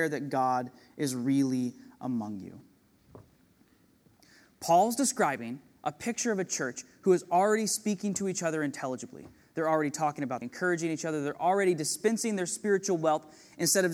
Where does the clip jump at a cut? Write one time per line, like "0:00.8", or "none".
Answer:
0:10.4